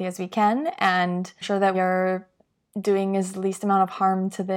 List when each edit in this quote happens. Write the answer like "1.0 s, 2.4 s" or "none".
1.4 s, 1.7 s